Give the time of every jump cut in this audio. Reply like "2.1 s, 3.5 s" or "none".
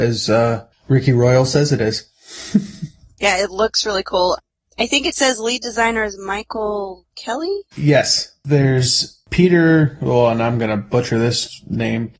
none